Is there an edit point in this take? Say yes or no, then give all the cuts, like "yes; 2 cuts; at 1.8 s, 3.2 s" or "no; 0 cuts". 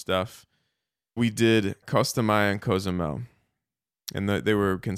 yes; 2 cuts; at 1.2 s, 1.8 s